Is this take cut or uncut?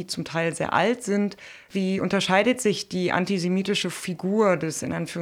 uncut